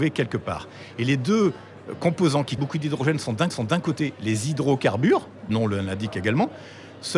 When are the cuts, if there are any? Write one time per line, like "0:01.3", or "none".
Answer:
0:02.6
0:03.5
0:05.5